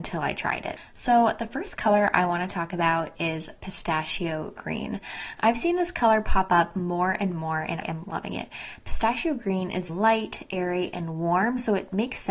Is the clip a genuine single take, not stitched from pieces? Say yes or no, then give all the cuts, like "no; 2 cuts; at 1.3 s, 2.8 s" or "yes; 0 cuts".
no; 2 cuts; at 7.8 s, 9.9 s